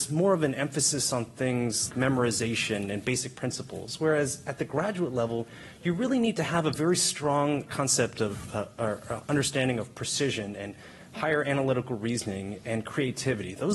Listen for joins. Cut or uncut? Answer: cut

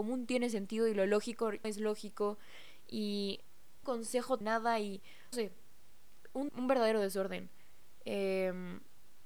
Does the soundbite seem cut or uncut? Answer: cut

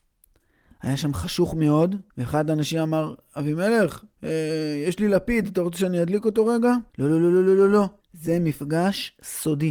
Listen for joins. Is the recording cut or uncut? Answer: cut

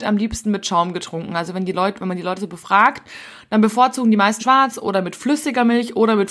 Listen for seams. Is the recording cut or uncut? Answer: cut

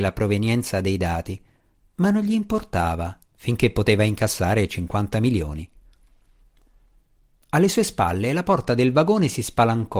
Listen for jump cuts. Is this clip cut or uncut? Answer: uncut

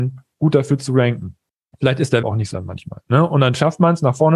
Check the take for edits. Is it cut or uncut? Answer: cut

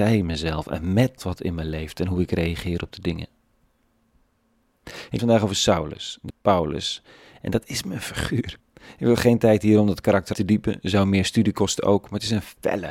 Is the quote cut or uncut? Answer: cut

